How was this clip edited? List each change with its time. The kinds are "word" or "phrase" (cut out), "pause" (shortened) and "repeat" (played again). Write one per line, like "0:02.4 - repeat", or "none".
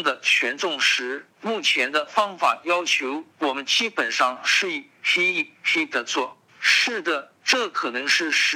0:01.3 - pause
0:03.3 - pause
0:06.5 - pause
0:07.3 - pause